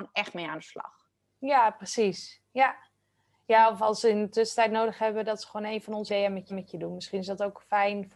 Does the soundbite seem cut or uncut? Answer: cut